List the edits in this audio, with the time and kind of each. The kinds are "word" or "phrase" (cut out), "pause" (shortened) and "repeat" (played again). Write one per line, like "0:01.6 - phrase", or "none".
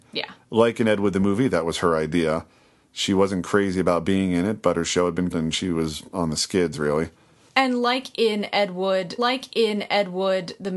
0:05.3 - word
0:09.2 - repeat